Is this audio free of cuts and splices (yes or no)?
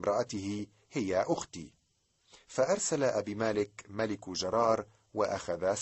yes